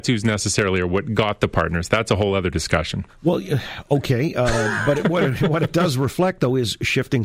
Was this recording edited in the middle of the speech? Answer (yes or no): no